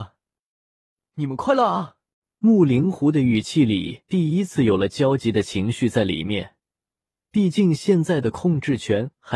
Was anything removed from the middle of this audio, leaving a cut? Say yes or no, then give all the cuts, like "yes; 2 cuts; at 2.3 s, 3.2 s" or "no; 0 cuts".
yes; 1 cut; at 2.1 s